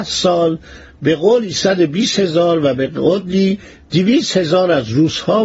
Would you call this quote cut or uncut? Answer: uncut